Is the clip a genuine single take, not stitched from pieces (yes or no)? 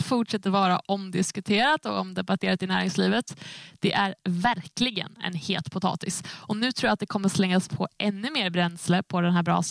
yes